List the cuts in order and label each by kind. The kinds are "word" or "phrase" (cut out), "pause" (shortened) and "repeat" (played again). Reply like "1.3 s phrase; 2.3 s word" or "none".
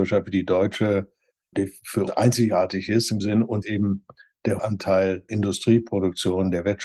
1.5 s word; 2.1 s word; 3.2 s word; 3.6 s word; 4.6 s word; 5.3 s word